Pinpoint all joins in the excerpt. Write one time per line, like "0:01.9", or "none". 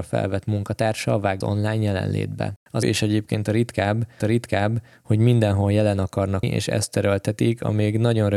0:01.4
0:02.8
0:04.2
0:06.4